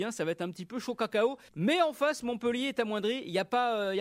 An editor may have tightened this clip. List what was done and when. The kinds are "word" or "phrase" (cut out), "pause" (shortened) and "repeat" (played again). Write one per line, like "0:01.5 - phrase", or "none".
0:01.5 - pause